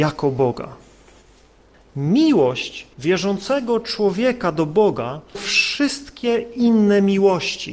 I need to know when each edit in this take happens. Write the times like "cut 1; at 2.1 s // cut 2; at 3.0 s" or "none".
cut 1; at 2.9 s // cut 2; at 5.3 s